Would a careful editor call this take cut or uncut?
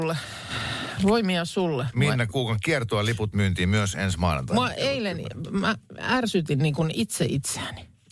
cut